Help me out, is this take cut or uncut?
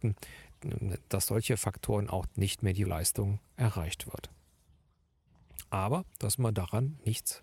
cut